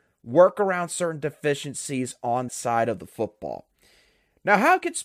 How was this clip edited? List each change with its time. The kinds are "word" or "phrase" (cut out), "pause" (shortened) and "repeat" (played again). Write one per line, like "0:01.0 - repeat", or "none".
0:02.5 - word